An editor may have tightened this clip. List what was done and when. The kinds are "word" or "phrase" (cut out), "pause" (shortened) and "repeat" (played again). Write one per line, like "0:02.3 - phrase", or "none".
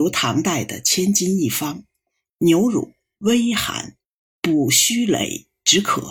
none

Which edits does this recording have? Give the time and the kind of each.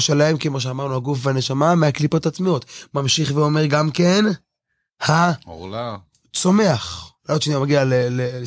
none

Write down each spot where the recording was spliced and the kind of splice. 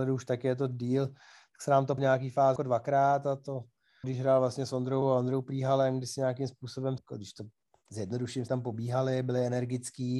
0:02.0 - word
0:02.6 - word
0:04.0 - phrase
0:05.0 - word
0:07.0 - phrase
0:08.5 - phrase

